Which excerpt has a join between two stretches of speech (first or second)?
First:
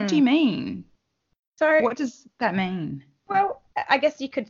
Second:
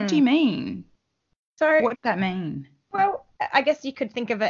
second